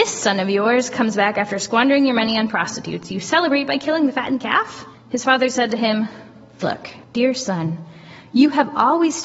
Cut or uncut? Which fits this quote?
cut